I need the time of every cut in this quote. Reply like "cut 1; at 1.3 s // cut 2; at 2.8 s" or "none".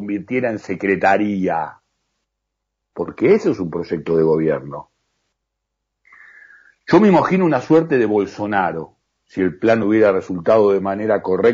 none